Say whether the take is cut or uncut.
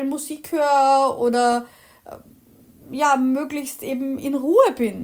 uncut